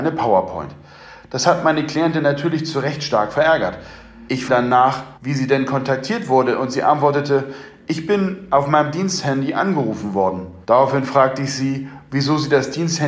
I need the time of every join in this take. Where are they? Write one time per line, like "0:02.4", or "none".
0:04.5
0:05.2
0:10.6